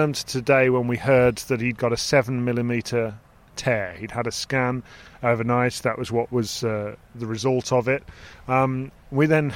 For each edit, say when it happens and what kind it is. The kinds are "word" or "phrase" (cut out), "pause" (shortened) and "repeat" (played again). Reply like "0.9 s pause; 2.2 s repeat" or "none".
none